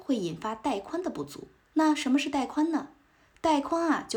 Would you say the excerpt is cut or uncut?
cut